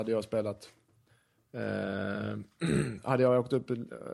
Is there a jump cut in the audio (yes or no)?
no